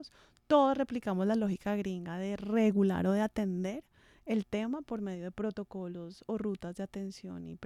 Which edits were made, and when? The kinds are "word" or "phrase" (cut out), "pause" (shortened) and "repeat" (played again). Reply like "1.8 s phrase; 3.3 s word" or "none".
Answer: none